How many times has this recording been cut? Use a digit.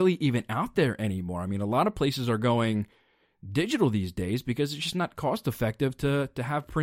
0